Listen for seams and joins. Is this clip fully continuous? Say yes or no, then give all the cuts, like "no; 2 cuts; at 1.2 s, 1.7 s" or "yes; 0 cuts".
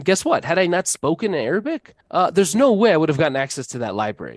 no; 1 cut; at 2.0 s